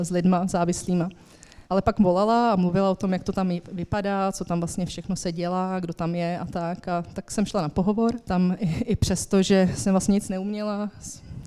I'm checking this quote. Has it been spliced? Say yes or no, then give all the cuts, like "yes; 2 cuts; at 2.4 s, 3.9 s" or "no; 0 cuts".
yes; 2 cuts; at 1.6 s, 8.2 s